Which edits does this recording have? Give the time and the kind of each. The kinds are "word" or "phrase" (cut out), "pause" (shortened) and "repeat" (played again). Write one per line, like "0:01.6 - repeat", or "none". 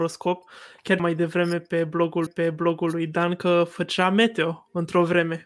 0:01.0 - word
0:02.3 - repeat